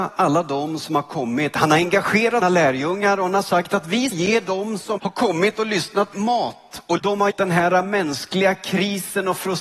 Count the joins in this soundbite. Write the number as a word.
six